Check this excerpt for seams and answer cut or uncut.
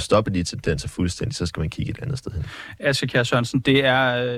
uncut